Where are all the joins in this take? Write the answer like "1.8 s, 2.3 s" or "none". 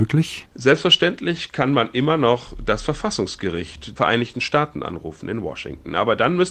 4.0 s